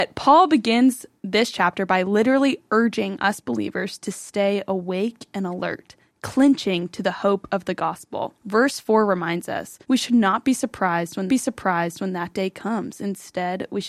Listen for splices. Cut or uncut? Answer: cut